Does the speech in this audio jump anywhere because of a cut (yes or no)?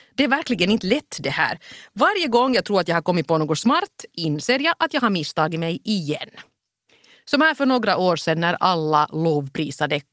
no